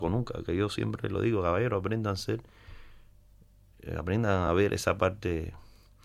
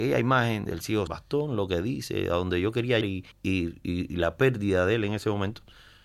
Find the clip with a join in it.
second; 3 cuts; at 1.1 s, 3.0 s, 3.3 s

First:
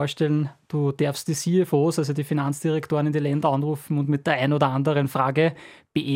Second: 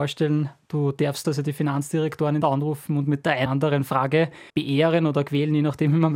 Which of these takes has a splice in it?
second; 4 cuts; at 1.2 s, 2.4 s, 3.5 s, 4.5 s

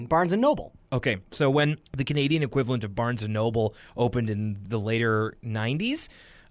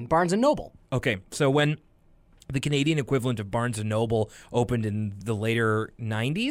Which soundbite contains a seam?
first; 1 cut; at 1.9 s

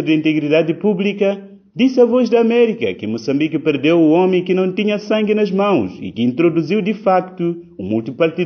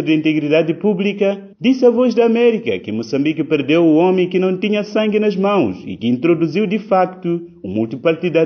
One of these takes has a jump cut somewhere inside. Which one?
second; 1 cut; at 1.5 s

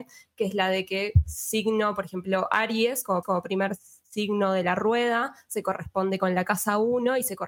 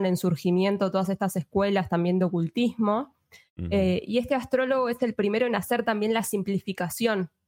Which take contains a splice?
first; 1 cut; at 3.2 s

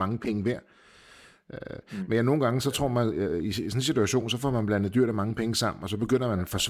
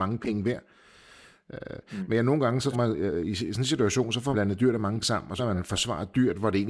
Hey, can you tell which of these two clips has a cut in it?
second; 4 cuts; at 2.7 s, 4.3 s, 5.0 s, 5.4 s

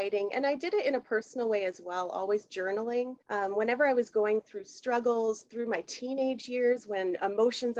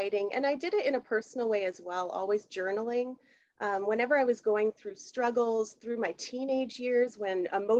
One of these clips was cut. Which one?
first; 1 cut; at 3.2 s

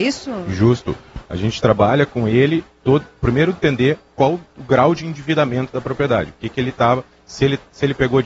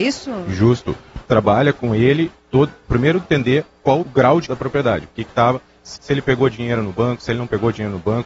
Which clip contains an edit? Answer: second; 5 cuts; at 1.3 s, 4.0 s, 4.5 s, 5.3 s, 6.0 s

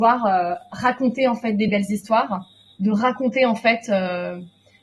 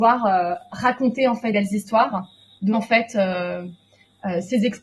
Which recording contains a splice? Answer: second; 2 cuts; at 1.5 s, 2.7 s

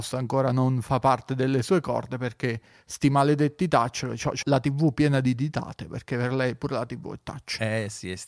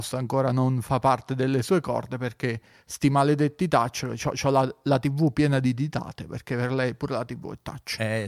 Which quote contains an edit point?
first; 1 cut; at 4.4 s

